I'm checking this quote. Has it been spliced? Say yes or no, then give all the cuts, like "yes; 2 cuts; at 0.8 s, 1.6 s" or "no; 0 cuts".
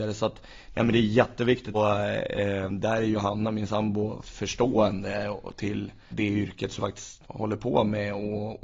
yes; 5 cuts; at 1.7 s, 4.2 s, 6.1 s, 6.8 s, 7.2 s